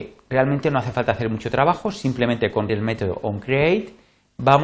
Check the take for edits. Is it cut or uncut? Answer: cut